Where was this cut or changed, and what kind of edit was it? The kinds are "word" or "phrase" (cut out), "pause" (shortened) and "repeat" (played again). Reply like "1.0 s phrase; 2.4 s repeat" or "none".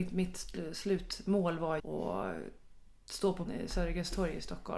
1.8 s word; 3.5 s word